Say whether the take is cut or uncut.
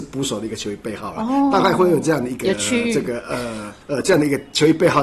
cut